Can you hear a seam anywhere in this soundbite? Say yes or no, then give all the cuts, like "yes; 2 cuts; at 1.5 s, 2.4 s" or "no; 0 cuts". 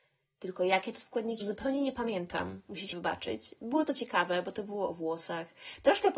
yes; 2 cuts; at 1.4 s, 2.9 s